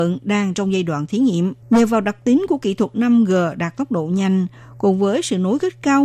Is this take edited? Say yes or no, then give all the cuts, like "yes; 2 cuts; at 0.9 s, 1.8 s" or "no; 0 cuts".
yes; 1 cut; at 1.6 s